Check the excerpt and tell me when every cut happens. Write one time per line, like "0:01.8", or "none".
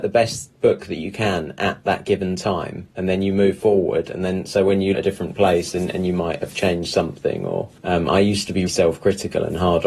0:02.9
0:04.9
0:07.8
0:08.7